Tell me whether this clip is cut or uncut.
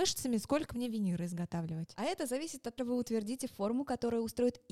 cut